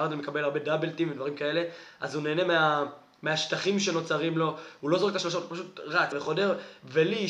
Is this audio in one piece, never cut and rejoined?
no; 1 cut; at 6.1 s

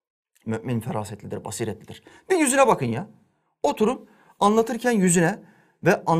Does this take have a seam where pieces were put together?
no; 0 cuts

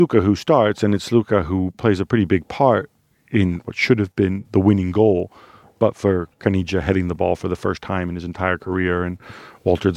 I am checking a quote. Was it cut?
no; 0 cuts

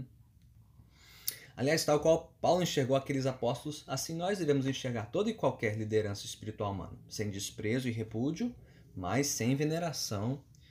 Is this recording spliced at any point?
no; 0 cuts

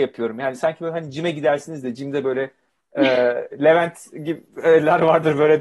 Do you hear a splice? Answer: no; 0 cuts

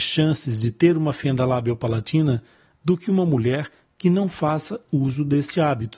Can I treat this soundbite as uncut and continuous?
yes; 0 cuts

